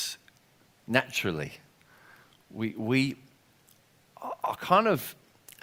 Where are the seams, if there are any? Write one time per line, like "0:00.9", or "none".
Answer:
none